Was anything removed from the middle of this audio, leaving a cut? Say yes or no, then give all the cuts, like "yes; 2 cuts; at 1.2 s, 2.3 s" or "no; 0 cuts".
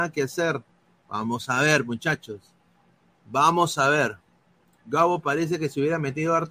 no; 0 cuts